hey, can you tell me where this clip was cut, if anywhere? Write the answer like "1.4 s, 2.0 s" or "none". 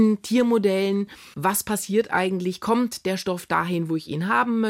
1.3 s